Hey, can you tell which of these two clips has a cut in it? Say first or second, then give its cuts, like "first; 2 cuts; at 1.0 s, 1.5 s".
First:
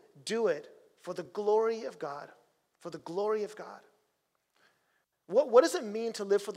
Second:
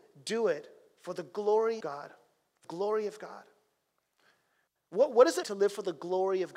second; 3 cuts; at 1.8 s, 2.6 s, 5.4 s